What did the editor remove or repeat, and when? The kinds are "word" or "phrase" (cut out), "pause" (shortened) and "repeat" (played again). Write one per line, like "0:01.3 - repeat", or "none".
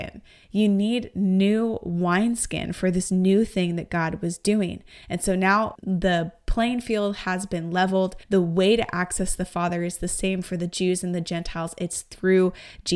0:05.8 - word
0:08.2 - pause